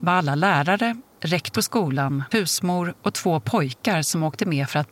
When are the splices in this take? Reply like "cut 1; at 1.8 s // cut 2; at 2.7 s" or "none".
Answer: cut 1; at 1.5 s // cut 2; at 2.3 s